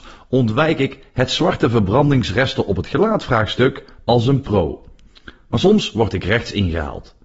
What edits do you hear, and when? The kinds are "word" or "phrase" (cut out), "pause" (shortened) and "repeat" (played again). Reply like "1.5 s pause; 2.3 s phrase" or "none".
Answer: none

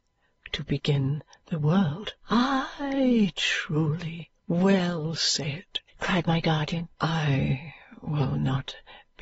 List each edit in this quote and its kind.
2.2 s pause; 4.4 s pause; 5.9 s pause; 6.9 s pause

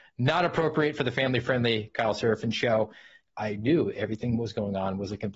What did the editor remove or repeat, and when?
3.2 s word

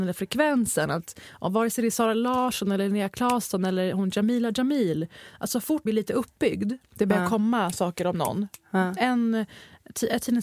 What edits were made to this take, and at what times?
5.9 s word

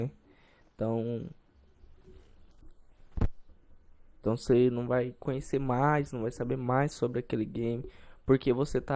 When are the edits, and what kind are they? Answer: none

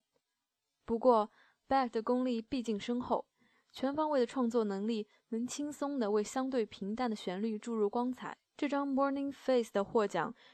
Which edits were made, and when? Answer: 8.5 s pause

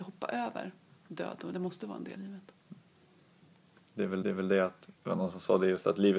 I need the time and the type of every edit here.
1.5 s phrase; 2.2 s word; 4.2 s repeat; 5.0 s pause

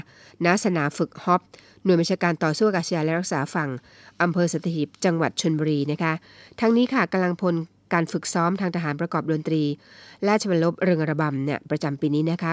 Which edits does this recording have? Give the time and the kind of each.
none

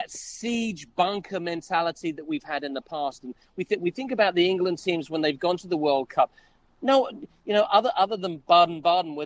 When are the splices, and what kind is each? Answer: none

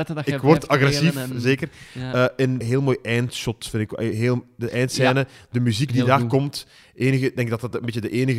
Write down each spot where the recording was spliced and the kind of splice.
2.6 s phrase

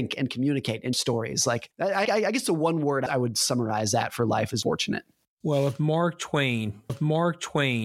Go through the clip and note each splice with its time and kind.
0.9 s word; 2.1 s word; 3.1 s word; 4.6 s word; 6.9 s repeat

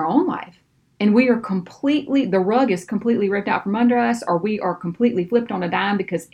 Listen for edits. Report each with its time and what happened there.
none

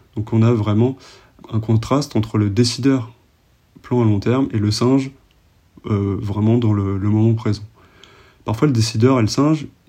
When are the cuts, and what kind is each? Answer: 1.4 s word

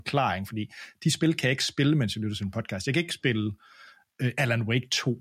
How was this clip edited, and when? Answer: none

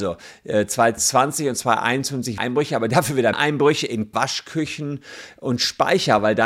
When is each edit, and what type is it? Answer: 2.4 s word; 3.3 s word; 4.1 s word

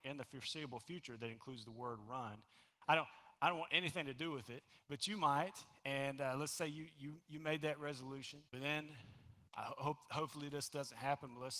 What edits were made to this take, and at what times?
8.5 s pause; 9.5 s pause

